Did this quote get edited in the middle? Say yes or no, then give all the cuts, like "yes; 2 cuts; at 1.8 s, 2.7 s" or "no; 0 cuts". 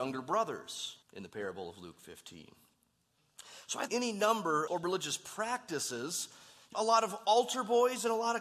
yes; 4 cuts; at 1.0 s, 3.9 s, 4.7 s, 6.7 s